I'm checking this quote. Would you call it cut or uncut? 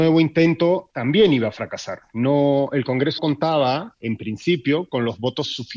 cut